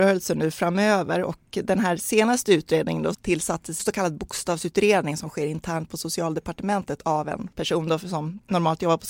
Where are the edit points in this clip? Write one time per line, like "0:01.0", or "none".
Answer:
0:03.1
0:03.8